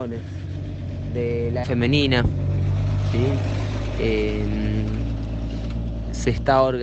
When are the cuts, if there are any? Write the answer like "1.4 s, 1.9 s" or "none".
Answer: 1.6 s